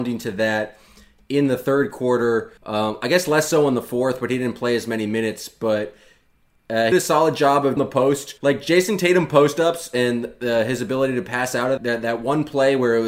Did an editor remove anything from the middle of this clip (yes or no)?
yes